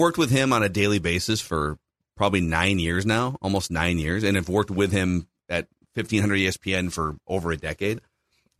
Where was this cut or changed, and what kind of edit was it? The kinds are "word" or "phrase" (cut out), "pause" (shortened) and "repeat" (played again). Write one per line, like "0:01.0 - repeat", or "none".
none